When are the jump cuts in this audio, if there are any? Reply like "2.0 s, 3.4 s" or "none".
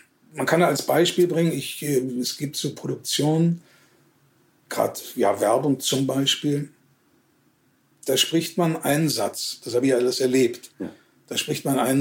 none